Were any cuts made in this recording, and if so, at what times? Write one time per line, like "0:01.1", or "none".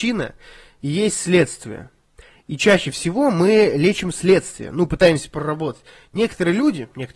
none